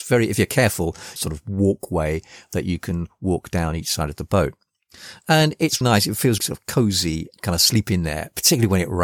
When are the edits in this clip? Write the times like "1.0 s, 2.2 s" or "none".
1.2 s, 5.8 s, 6.4 s, 7.3 s